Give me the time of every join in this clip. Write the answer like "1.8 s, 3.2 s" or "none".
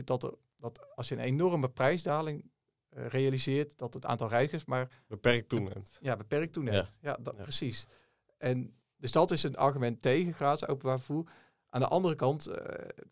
none